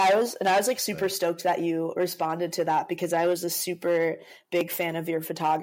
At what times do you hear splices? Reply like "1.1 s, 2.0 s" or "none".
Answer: none